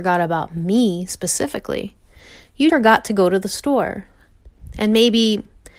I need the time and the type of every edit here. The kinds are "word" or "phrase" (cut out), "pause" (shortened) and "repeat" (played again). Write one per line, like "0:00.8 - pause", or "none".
0:02.7 - word